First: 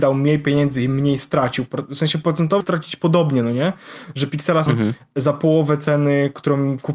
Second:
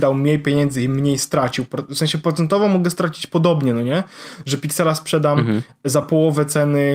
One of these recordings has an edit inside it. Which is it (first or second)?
first